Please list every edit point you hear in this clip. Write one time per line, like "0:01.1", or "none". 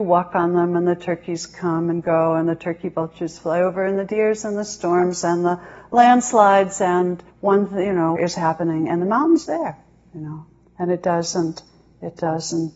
0:07.3
0:08.2
0:09.5
0:10.6